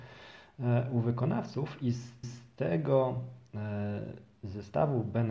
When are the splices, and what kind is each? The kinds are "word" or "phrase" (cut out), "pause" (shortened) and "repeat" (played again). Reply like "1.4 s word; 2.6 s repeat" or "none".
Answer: 2.2 s repeat

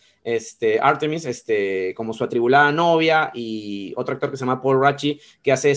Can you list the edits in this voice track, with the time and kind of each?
none

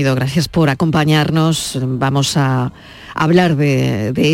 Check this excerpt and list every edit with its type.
none

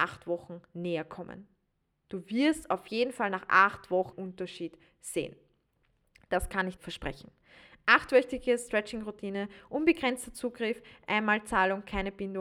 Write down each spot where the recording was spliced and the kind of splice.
4.1 s word; 6.8 s word

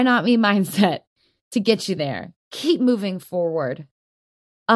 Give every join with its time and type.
2.4 s pause

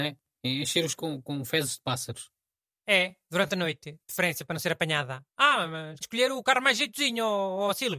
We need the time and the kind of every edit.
0.9 s phrase; 5.3 s pause; 6.0 s word

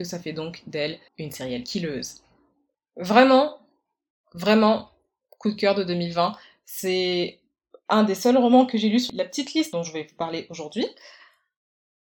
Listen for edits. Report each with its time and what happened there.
1.1 s pause

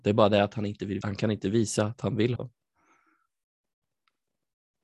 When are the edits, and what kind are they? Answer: 1.0 s word; 2.4 s word

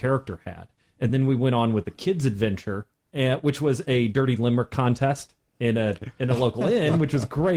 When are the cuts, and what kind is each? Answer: none

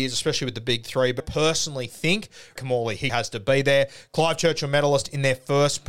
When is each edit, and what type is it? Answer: 1.2 s word; 2.6 s word; 3.1 s word

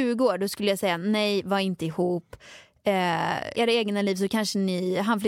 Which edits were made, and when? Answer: 3.5 s word

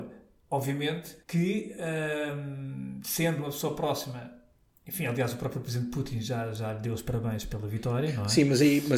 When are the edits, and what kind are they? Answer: 1.2 s pause; 4.6 s pause

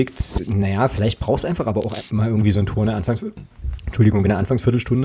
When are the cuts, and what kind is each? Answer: none

